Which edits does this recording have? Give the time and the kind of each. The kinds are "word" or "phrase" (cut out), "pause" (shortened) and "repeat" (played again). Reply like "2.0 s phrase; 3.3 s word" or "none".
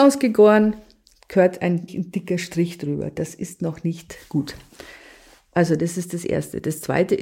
1.9 s word